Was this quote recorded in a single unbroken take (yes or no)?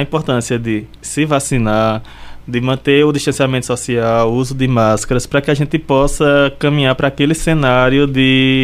no